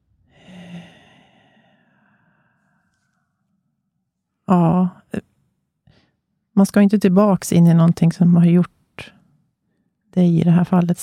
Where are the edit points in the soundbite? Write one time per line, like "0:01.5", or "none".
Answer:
none